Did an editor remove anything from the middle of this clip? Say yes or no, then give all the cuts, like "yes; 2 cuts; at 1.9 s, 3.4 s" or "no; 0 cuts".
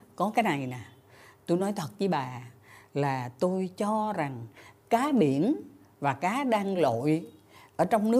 no; 0 cuts